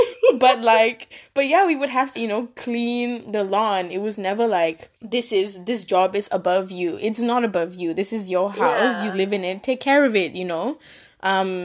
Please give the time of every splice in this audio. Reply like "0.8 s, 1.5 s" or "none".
2.2 s, 5.0 s